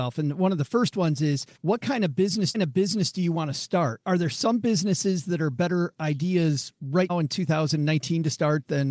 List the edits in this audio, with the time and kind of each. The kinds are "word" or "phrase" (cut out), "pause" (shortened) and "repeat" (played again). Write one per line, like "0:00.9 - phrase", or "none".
0:01.6 - pause
0:02.5 - repeat
0:07.1 - word